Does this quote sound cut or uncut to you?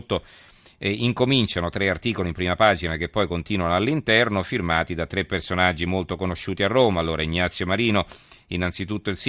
uncut